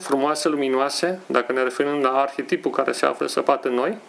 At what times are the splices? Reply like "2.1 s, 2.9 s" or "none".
none